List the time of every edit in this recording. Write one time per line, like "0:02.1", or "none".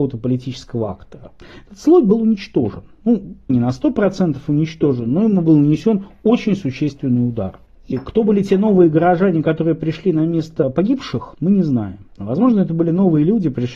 none